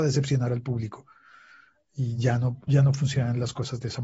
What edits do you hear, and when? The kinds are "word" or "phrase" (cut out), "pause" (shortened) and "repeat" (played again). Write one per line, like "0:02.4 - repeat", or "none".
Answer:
none